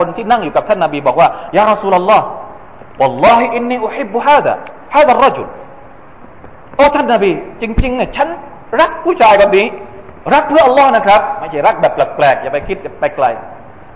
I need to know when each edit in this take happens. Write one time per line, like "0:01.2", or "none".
0:02.9